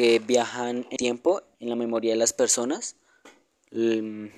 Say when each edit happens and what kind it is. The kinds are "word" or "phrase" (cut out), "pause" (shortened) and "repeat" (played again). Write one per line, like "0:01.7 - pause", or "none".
0:01.0 - word
0:01.5 - word